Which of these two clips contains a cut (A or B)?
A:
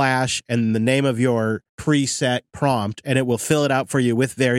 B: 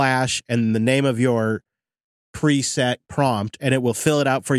A